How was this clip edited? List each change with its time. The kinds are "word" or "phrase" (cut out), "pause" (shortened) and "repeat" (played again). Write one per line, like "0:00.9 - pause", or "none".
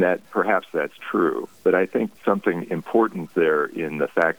0:01.6 - pause
0:02.2 - word

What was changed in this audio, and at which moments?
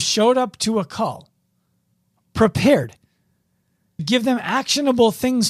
0:04.0 - word

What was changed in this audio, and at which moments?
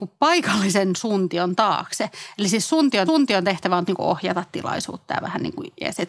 0:03.1 - repeat
0:03.9 - phrase

